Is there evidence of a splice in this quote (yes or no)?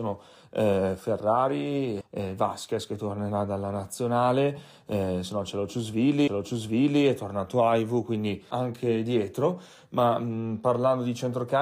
yes